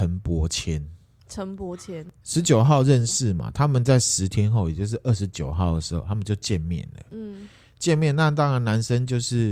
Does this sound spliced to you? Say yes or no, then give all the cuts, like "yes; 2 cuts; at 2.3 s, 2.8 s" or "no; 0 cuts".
no; 0 cuts